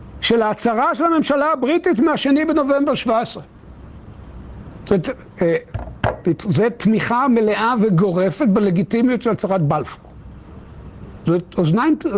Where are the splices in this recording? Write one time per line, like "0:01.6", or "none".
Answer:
none